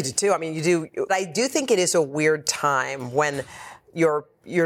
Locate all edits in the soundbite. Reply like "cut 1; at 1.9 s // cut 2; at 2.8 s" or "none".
cut 1; at 1.1 s